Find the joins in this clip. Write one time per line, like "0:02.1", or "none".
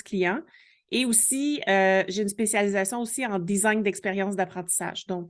none